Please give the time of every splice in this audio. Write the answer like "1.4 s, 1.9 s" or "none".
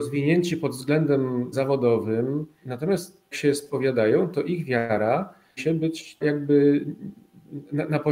1.5 s, 2.6 s, 3.3 s, 5.6 s, 6.2 s